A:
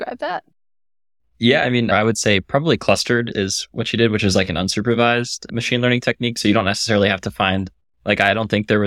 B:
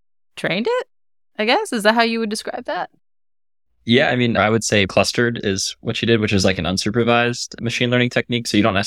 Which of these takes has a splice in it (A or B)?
B